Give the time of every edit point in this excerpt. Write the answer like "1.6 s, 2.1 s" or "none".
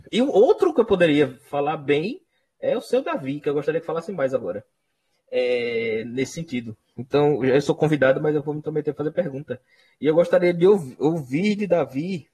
none